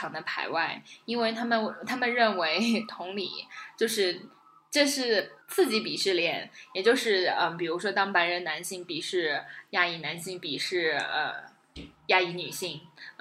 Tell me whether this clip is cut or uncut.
cut